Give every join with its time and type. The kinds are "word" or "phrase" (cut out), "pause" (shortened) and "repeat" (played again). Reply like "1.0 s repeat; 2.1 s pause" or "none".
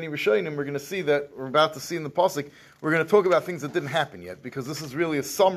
none

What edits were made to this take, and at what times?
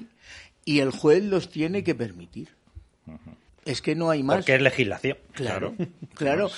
3.5 s pause

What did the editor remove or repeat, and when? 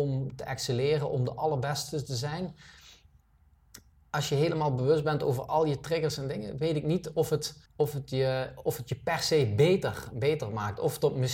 3.9 s pause; 7.7 s pause

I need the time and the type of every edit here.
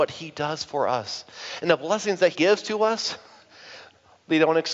2.3 s word

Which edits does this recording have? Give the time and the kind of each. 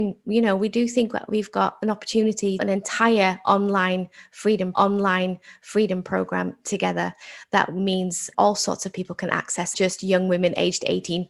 2.6 s phrase; 4.7 s repeat; 8.3 s word; 9.7 s phrase

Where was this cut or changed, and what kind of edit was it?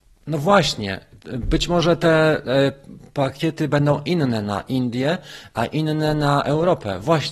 none

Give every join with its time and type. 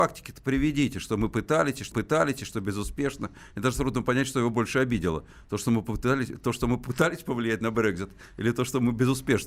1.9 s repeat

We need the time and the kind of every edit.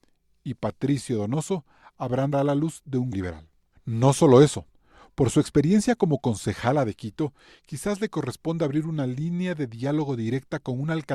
2.3 s phrase; 3.1 s word

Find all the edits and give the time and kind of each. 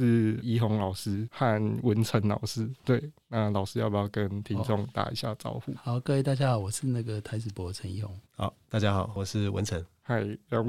2.8 s pause; 8.3 s pause

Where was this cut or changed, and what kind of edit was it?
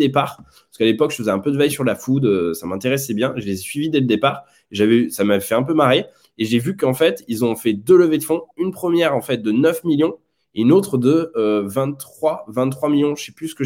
none

